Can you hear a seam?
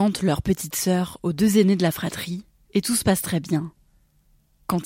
no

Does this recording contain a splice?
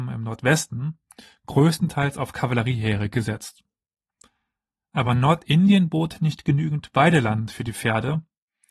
no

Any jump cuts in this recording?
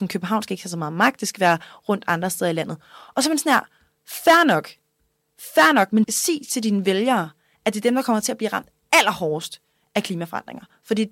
no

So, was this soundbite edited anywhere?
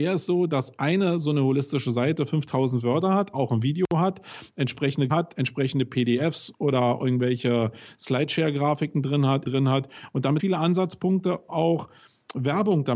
yes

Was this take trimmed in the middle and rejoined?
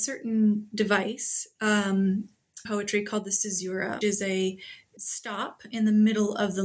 yes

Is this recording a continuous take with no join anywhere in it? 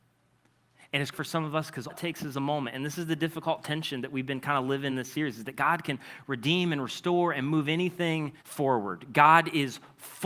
no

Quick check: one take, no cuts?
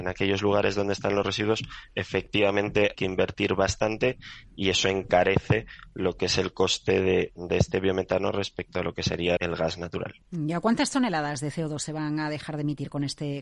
no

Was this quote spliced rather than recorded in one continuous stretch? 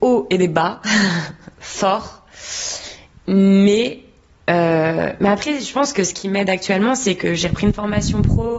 no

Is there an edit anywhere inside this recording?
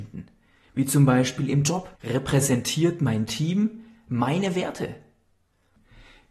yes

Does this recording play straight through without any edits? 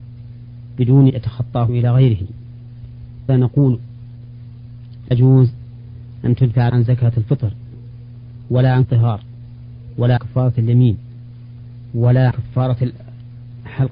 no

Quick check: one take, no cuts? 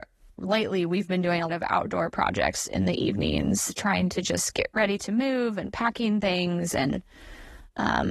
no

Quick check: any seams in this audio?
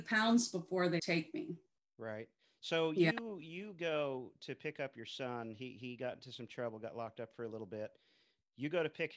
yes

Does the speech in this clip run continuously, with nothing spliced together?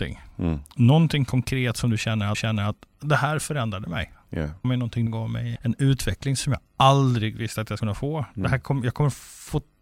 no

